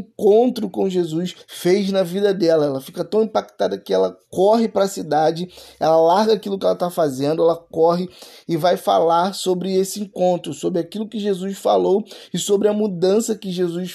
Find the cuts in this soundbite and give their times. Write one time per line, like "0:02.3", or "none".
0:01.4

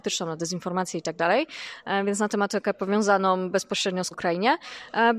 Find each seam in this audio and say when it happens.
0:04.1

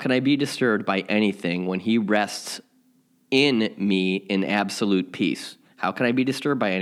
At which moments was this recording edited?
none

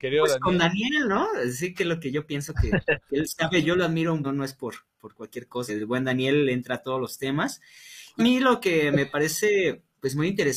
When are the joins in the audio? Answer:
0:03.6
0:04.2
0:05.7
0:08.2

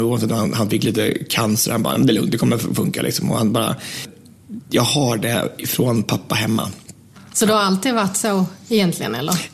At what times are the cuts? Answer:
none

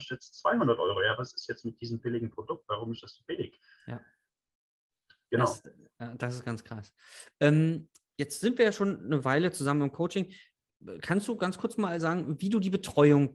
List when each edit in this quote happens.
none

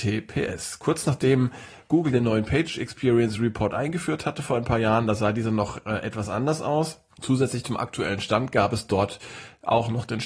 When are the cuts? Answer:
0:07.1

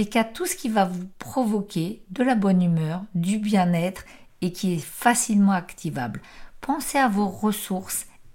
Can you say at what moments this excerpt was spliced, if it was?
none

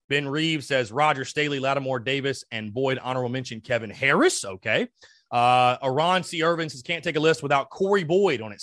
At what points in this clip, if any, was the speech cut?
none

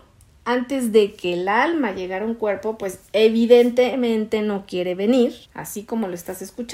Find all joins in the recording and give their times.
0:05.4

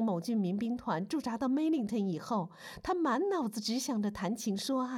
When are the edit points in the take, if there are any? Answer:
none

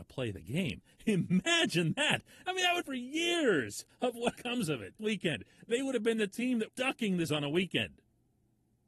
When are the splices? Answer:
0:02.8
0:03.9
0:04.4
0:05.0
0:06.7
0:07.3

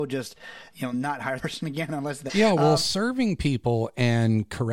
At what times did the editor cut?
0:01.4
0:02.3

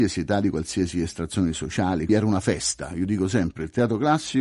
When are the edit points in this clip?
0:02.1

